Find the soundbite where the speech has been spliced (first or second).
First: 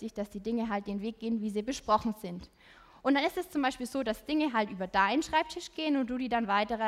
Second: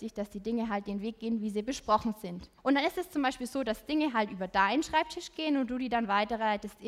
second